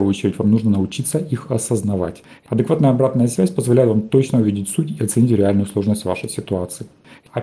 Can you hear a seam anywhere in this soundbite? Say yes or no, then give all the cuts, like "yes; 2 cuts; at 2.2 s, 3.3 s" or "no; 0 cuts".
no; 0 cuts